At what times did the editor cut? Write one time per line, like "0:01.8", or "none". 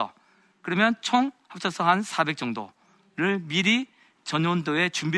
none